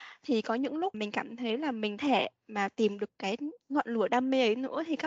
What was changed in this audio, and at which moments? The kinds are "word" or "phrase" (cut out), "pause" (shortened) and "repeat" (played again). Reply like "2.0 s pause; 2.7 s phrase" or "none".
0.9 s word; 2.0 s word; 3.6 s pause